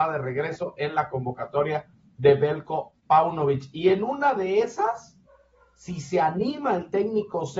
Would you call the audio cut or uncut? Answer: uncut